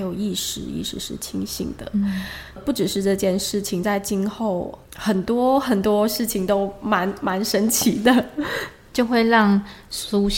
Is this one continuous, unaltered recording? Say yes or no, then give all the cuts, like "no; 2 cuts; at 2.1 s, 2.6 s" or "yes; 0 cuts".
no; 2 cuts; at 2.6 s, 4.9 s